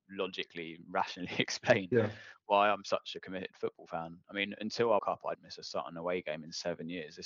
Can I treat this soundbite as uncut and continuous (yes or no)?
no